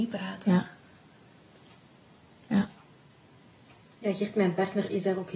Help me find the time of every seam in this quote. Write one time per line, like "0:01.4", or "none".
none